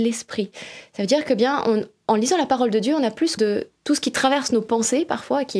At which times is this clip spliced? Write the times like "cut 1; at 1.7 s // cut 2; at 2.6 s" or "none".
cut 1; at 3.4 s // cut 2; at 3.8 s